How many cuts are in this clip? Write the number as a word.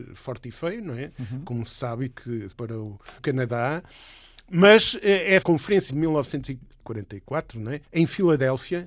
six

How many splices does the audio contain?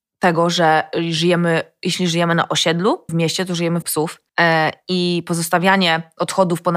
three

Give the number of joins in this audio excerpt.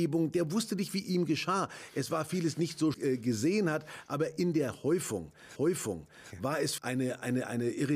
three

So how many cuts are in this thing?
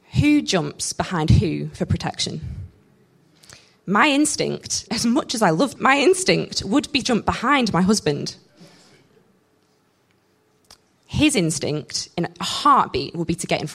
three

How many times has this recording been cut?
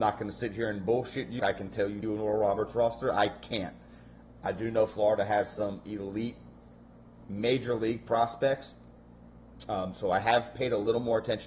two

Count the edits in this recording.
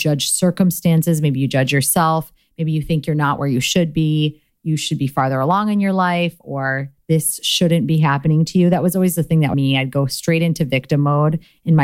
one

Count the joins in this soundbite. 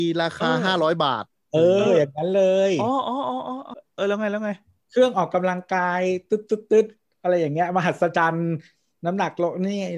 zero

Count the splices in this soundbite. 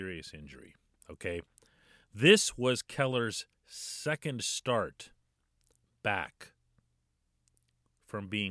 zero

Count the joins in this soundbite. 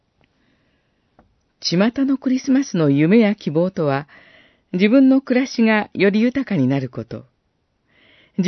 zero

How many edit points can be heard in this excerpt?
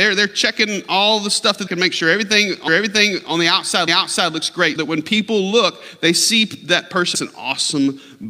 five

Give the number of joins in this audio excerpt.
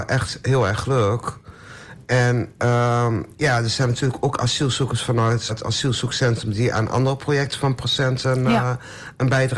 one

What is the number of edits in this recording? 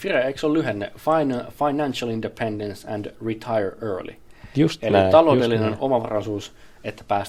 zero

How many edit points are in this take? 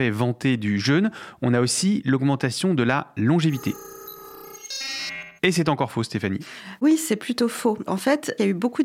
one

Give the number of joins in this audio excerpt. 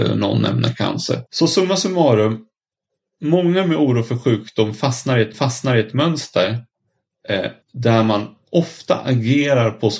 three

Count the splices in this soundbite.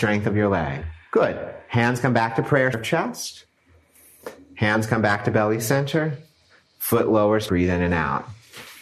three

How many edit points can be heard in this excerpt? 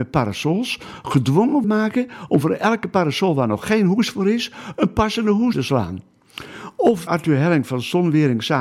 three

